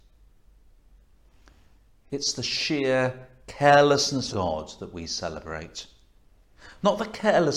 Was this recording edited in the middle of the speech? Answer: yes; 1 cut; at 4.3 s

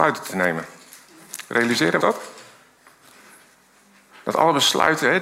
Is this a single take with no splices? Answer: no; 1 cut; at 2.0 s

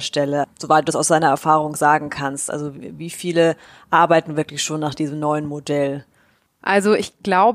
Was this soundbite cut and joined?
no; 0 cuts

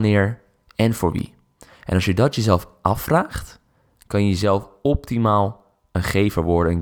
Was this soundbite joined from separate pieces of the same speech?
no; 0 cuts

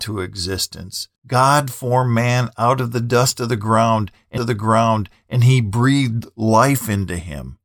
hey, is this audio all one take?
no; 2 cuts; at 1.2 s, 4.4 s

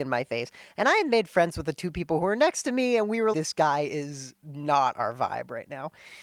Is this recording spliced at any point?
yes; 1 cut; at 3.3 s

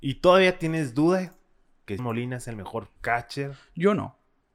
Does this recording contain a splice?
yes; 2 cuts; at 2.0 s, 3.0 s

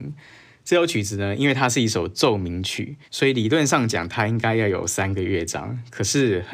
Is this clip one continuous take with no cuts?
no; 1 cut; at 3.0 s

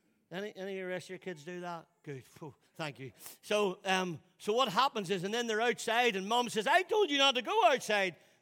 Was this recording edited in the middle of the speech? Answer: yes; 1 cut; at 2.7 s

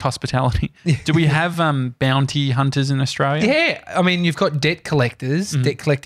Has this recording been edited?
no; 0 cuts

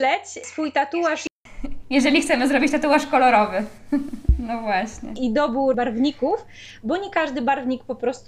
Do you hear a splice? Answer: no; 0 cuts

